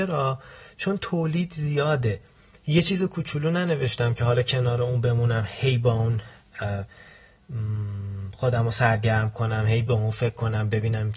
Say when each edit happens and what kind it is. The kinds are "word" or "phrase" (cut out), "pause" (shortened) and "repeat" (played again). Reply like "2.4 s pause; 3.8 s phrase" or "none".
none